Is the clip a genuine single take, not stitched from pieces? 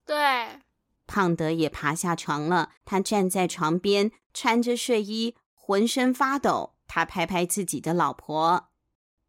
no; 3 cuts; at 1.0 s, 2.8 s, 6.8 s

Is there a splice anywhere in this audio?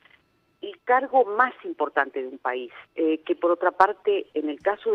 yes; 1 cut; at 2.9 s

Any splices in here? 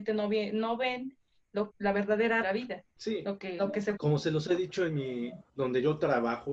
yes; 5 cuts; at 1.7 s, 2.4 s, 2.9 s, 3.6 s, 4.0 s

